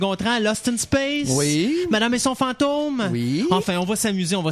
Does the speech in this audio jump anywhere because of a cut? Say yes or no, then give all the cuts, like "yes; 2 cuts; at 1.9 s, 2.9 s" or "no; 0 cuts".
no; 0 cuts